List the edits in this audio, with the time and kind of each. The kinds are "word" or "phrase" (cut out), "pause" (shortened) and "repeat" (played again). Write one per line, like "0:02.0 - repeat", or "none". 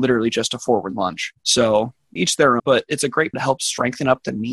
0:02.2 - word
0:02.6 - word
0:03.3 - word